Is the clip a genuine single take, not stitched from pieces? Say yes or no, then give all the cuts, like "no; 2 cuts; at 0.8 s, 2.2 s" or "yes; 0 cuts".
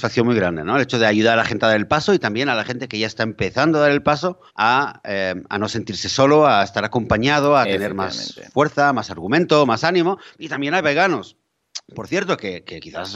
no; 1 cut; at 4.5 s